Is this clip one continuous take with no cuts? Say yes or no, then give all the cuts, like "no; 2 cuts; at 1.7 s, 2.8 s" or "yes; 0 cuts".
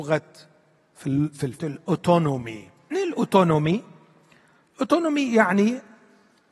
no; 2 cuts; at 1.6 s, 2.9 s